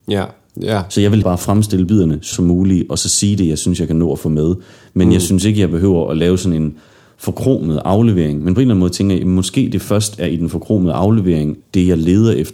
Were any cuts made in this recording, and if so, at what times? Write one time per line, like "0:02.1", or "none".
0:01.2
0:02.3
0:11.6

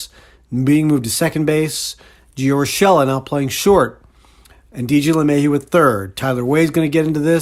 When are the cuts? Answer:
none

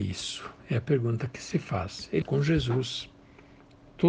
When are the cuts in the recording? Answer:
0:02.2

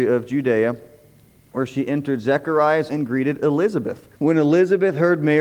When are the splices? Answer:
0:02.9
0:04.1

